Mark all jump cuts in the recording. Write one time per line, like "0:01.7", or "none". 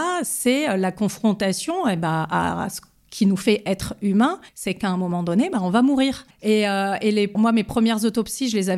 0:04.5
0:07.3